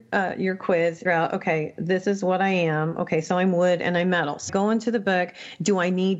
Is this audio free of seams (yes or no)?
no